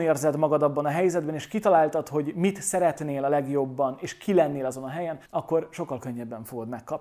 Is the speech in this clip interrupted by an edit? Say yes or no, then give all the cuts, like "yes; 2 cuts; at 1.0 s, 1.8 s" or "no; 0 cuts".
yes; 1 cut; at 5.2 s